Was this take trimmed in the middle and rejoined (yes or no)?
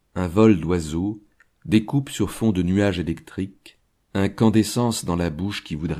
no